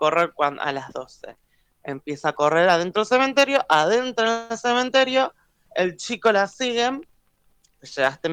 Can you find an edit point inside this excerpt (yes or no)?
no